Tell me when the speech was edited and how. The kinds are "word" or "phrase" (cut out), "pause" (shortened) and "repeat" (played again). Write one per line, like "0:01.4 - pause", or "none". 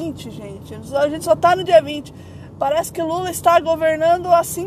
none